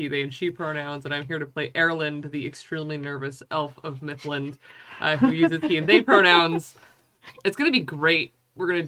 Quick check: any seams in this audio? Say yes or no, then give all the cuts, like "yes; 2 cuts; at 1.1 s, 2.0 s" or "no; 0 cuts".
no; 0 cuts